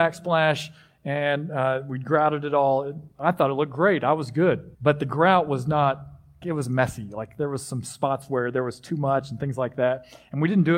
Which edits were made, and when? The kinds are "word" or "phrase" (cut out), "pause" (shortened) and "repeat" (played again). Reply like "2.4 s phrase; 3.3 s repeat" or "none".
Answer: 3.1 s pause; 4.7 s pause; 6.4 s word